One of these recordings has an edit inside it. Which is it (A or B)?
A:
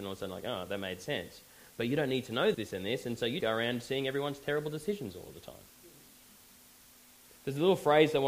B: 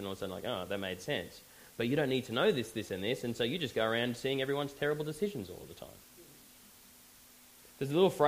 A